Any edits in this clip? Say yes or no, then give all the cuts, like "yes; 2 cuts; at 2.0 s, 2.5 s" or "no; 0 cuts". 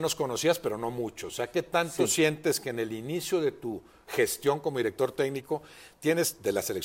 no; 0 cuts